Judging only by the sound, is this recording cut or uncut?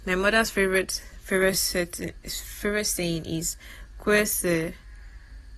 uncut